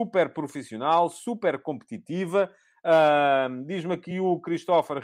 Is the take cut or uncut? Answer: uncut